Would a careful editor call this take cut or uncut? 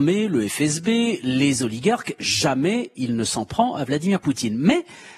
uncut